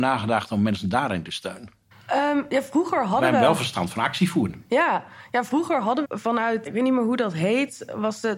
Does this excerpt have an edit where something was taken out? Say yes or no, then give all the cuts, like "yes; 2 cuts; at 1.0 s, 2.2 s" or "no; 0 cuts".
yes; 3 cuts; at 1.9 s, 6.0 s, 6.7 s